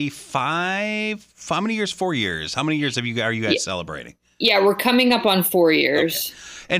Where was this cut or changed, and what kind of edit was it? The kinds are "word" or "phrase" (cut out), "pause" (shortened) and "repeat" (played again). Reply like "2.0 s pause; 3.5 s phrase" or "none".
none

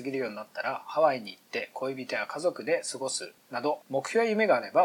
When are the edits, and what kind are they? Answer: 3.8 s pause

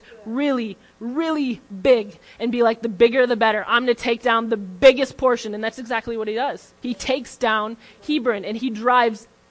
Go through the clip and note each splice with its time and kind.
6.8 s pause

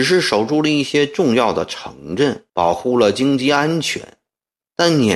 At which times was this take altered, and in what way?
2.5 s pause

